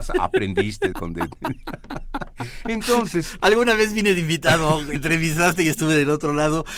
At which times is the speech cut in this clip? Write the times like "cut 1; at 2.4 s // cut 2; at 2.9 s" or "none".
cut 1; at 0.9 s // cut 2; at 5.0 s